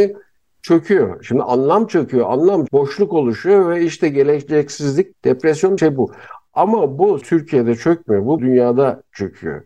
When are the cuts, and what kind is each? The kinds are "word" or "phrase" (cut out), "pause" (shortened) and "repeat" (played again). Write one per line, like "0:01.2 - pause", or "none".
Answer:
0:02.7 - word
0:05.1 - word
0:05.8 - word
0:07.2 - word
0:08.4 - word